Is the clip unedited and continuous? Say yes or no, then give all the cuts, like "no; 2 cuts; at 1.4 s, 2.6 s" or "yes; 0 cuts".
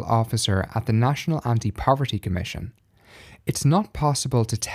yes; 0 cuts